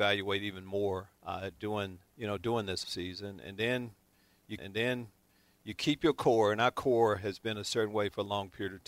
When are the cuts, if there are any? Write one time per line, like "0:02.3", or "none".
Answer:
0:01.2
0:02.1
0:02.8
0:04.6

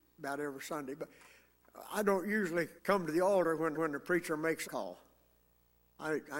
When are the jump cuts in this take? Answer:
0:02.8
0:03.7
0:04.6

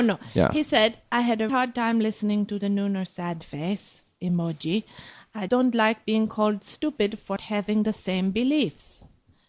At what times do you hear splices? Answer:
0:01.5
0:03.1
0:05.5
0:07.4

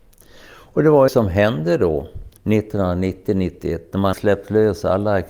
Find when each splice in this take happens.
0:01.1
0:02.4
0:04.1

